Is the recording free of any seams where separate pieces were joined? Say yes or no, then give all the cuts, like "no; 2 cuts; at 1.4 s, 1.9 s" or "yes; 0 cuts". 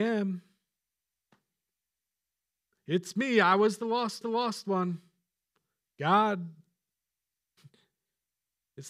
no; 1 cut; at 4.2 s